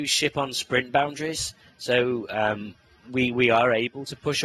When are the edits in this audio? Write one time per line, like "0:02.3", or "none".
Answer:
none